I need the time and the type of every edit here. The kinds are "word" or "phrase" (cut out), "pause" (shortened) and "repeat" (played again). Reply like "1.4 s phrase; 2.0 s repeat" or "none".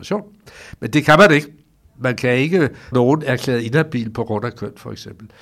2.9 s word